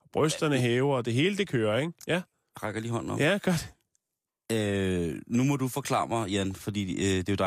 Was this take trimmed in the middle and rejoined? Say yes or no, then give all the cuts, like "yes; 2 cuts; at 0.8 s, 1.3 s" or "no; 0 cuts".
no; 0 cuts